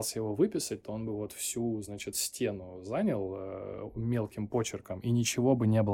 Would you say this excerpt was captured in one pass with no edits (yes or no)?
yes